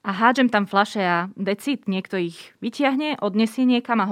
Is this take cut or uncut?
uncut